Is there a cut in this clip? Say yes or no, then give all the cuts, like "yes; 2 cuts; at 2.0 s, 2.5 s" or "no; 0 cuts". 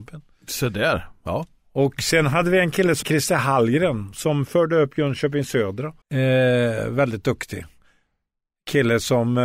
yes; 2 cuts; at 3.0 s, 6.0 s